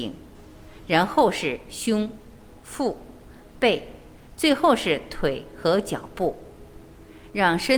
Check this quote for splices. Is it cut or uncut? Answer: uncut